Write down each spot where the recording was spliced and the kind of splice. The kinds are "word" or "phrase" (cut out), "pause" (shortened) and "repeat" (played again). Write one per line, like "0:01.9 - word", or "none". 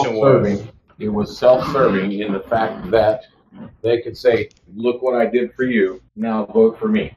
0:06.1 - pause